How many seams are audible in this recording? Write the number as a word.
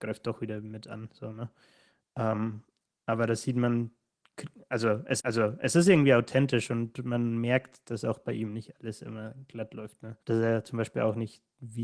two